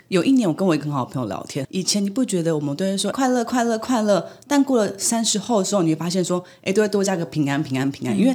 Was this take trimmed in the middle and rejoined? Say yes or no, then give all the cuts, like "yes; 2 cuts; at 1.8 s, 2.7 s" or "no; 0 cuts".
yes; 2 cuts; at 1.6 s, 3.1 s